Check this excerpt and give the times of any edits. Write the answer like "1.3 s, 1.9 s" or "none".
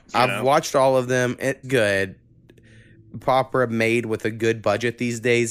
1.6 s, 3.2 s